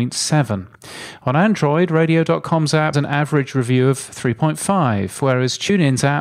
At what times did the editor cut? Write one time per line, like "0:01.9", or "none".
0:02.9